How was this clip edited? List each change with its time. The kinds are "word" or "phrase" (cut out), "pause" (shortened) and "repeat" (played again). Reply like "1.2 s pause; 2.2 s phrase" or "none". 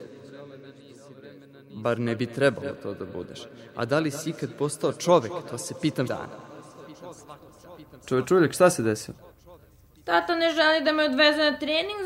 6.1 s word